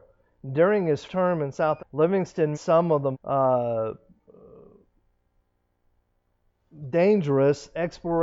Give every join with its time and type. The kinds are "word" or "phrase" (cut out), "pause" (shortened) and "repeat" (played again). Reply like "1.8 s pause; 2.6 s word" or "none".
1.1 s word; 1.8 s word; 2.5 s word; 3.1 s word